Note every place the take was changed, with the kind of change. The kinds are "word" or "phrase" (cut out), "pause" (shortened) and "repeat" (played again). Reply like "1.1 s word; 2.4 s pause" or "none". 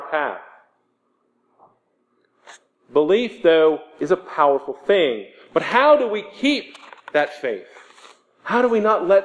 none